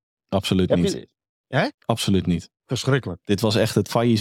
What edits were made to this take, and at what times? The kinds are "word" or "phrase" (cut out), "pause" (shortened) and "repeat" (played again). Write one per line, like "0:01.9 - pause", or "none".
0:01.7 - pause
0:02.6 - pause